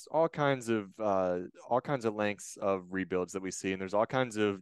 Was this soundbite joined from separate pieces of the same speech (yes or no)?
no